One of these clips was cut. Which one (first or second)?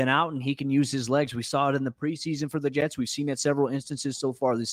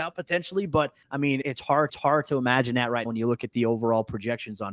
second